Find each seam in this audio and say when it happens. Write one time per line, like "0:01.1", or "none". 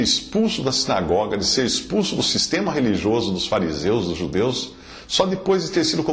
none